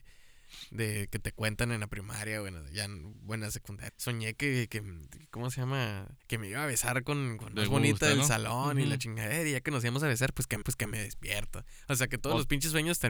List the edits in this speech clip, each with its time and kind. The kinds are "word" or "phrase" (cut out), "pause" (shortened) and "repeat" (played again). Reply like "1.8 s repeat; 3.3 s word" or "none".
3.9 s phrase; 6.2 s pause; 7.5 s phrase; 10.6 s repeat